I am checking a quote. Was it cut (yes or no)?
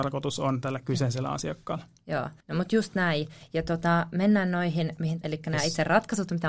yes